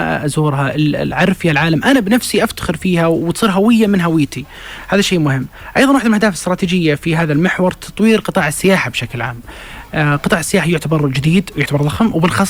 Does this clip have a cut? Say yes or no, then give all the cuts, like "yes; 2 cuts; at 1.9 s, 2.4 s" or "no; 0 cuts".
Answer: no; 0 cuts